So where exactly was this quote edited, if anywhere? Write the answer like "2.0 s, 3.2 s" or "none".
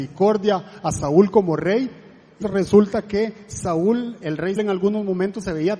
2.4 s, 4.2 s, 4.6 s